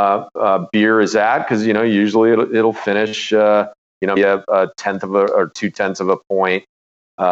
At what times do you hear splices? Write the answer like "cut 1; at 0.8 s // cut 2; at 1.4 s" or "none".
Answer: cut 1; at 4.2 s